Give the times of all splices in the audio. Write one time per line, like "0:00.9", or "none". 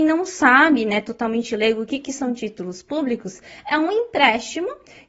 none